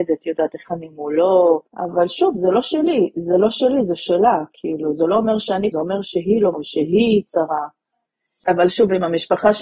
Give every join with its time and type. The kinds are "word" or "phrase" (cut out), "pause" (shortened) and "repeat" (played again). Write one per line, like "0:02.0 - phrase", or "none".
0:01.7 - pause
0:05.7 - word
0:06.5 - word
0:07.3 - phrase